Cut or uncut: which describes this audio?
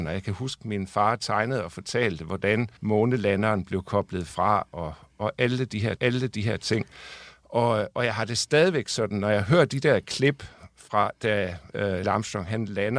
cut